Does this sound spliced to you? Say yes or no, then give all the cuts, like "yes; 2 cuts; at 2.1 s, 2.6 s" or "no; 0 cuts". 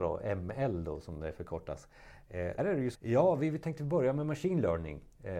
yes; 2 cuts; at 2.6 s, 2.9 s